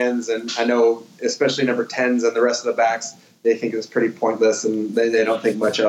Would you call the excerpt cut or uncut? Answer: uncut